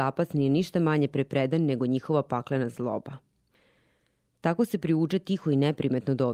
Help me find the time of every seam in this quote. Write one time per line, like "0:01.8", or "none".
none

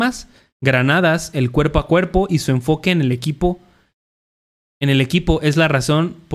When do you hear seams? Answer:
none

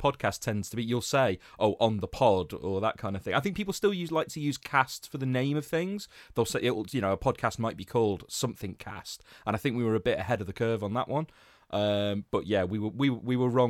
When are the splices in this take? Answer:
none

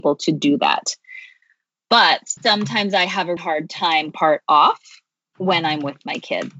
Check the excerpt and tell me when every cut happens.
0:02.4
0:03.4
0:04.1

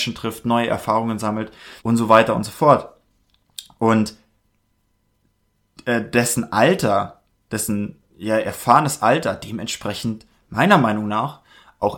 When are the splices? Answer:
0:01.8
0:08.1

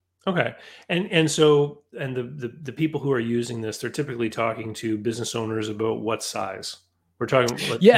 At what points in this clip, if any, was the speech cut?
none

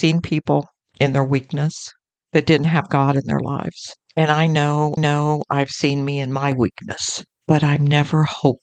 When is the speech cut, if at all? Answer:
0:05.0

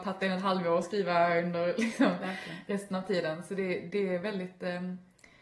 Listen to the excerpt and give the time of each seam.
none

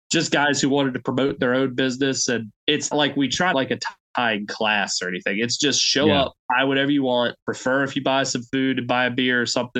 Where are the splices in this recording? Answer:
0:02.9
0:03.5
0:06.4

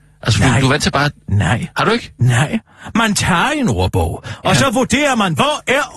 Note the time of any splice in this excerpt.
0:01.7

